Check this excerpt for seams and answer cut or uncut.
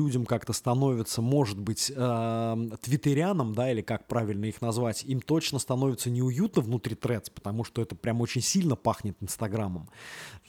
uncut